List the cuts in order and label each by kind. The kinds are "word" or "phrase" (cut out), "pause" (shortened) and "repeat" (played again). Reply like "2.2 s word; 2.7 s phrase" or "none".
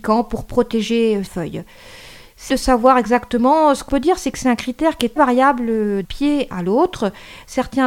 1.3 s word; 2.5 s word; 3.9 s word; 5.2 s word; 6.0 s word